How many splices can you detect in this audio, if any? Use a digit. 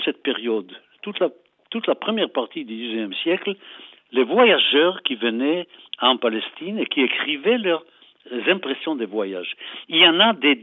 0